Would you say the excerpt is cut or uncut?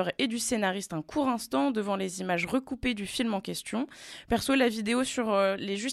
uncut